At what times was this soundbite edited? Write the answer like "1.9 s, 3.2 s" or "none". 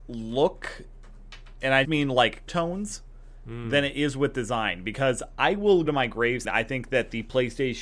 1.8 s, 2.5 s, 5.4 s, 5.9 s, 6.4 s